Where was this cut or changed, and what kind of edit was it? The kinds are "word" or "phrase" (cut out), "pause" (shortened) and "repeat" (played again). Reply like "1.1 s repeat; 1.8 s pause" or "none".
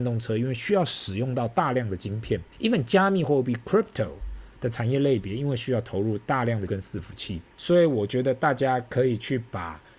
2.5 s pause; 6.7 s word; 7.5 s pause